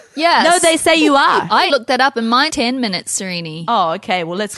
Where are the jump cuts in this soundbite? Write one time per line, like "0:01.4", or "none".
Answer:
0:01.7
0:02.5